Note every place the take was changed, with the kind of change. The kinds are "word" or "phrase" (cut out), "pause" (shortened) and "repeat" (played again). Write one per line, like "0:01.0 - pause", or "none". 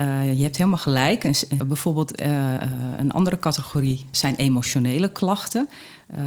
0:01.6 - word
0:03.0 - word
0:04.1 - word